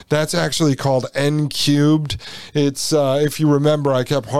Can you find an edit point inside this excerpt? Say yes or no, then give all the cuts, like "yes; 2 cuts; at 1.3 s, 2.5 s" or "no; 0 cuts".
no; 0 cuts